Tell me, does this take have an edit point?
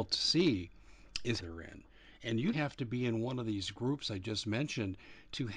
yes; 2 cuts; at 1.4 s, 2.5 s

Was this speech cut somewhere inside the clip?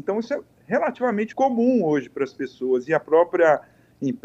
yes; 1 cut; at 1.3 s

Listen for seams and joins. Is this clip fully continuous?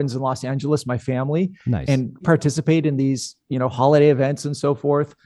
no; 1 cut; at 2.2 s

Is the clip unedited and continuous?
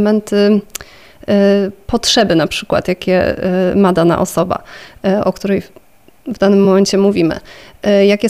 yes; 0 cuts

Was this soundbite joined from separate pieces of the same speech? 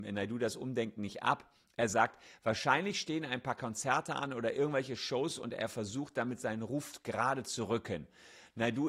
no; 0 cuts

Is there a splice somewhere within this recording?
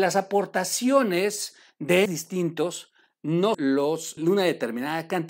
yes; 3 cuts; at 2.1 s, 3.5 s, 4.2 s

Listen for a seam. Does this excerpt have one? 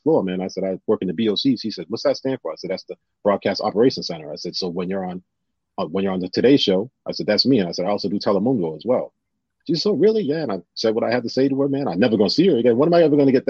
no; 0 cuts

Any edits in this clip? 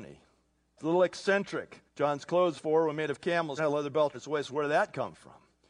yes; 4 cuts; at 1.9 s, 2.5 s, 3.6 s, 4.1 s

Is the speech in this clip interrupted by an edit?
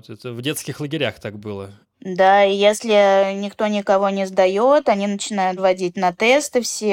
no; 0 cuts

